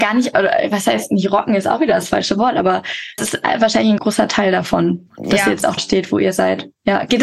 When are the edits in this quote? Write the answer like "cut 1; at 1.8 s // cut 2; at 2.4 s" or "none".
cut 1; at 3.2 s // cut 2; at 4.0 s // cut 3; at 5.8 s